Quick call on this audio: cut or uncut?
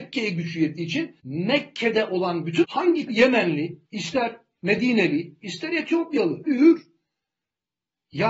cut